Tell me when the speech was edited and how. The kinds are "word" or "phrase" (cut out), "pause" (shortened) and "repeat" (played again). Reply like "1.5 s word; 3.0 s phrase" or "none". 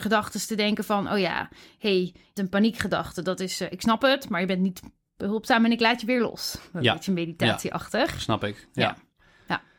2.4 s word